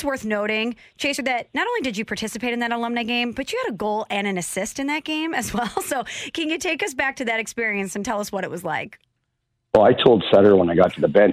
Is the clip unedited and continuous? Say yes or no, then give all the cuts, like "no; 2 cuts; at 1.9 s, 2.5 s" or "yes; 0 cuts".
yes; 0 cuts